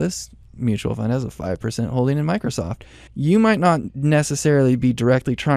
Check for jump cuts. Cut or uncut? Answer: cut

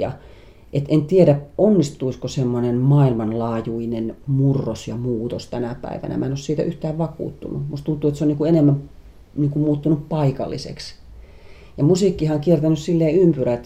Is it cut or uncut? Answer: uncut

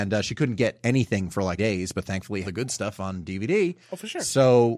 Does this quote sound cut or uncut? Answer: cut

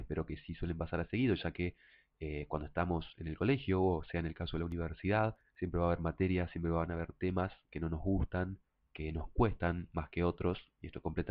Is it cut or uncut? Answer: uncut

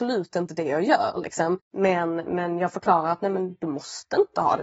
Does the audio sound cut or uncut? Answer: cut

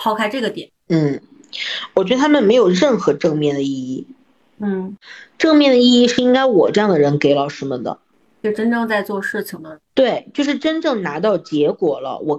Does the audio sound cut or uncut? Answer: uncut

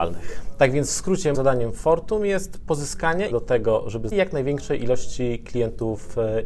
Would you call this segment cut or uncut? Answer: cut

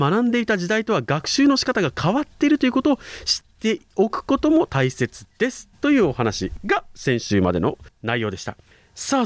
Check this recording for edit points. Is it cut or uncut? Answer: cut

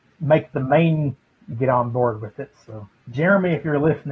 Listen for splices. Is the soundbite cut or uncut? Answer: cut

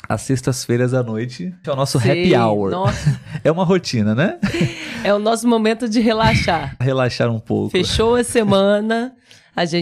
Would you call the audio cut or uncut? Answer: cut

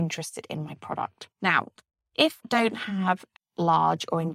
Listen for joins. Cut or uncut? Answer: cut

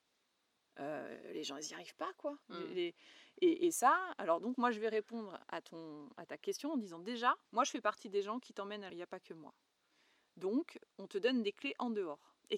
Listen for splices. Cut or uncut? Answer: cut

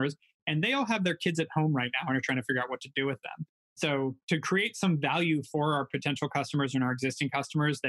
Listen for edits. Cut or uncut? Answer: uncut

